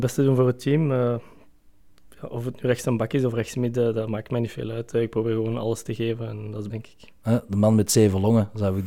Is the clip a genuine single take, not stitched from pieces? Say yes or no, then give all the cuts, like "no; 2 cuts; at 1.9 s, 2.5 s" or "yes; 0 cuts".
no; 1 cut; at 6.7 s